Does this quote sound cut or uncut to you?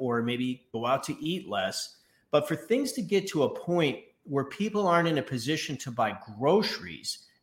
uncut